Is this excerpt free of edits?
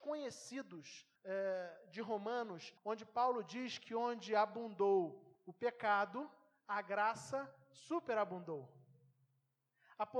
no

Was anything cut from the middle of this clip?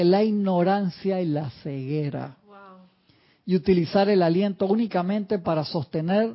no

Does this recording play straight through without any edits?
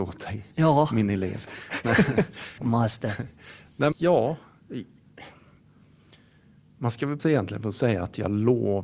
no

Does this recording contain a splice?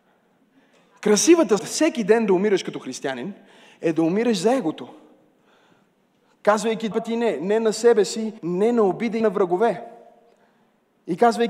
yes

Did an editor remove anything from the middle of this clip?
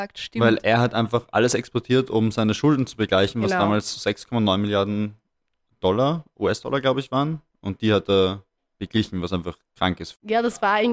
no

